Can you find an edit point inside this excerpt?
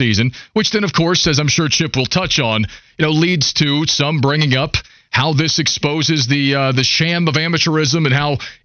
no; 0 cuts

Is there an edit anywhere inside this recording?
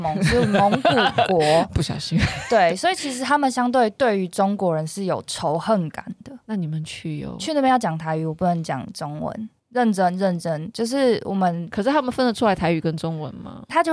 yes; 1 cut; at 9.6 s

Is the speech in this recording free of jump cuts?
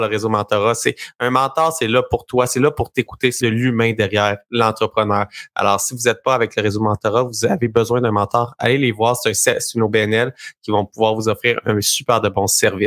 no; 1 cut; at 3.4 s

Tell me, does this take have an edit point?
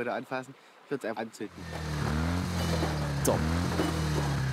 yes; 1 cut; at 1.1 s

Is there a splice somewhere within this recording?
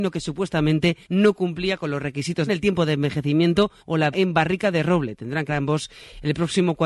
yes; 5 cuts; at 1.0 s, 2.5 s, 3.8 s, 4.1 s, 5.5 s

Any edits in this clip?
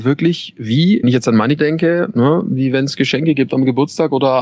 yes; 2 cuts; at 1.0 s, 1.6 s

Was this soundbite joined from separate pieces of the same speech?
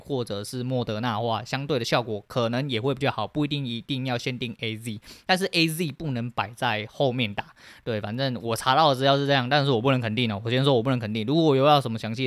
no; 0 cuts

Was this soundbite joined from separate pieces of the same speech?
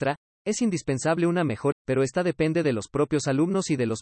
yes; 1 cut; at 1.7 s

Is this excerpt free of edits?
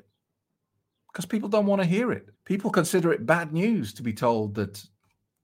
no; 1 cut; at 2.3 s

